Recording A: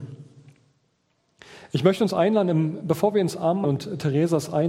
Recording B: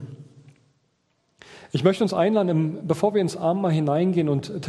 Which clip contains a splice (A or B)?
A